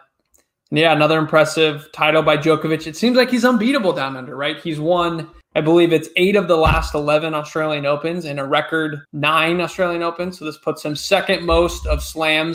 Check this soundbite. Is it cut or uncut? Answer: cut